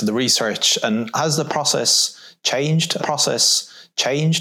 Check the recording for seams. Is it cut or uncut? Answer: cut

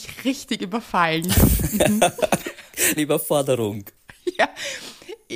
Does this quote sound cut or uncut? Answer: cut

